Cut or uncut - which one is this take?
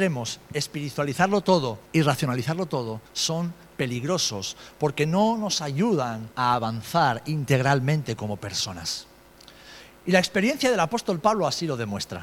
cut